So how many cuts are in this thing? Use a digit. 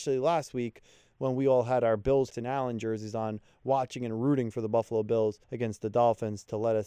2